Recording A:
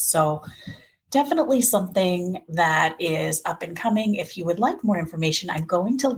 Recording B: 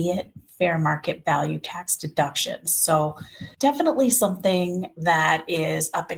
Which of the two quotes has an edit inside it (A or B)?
B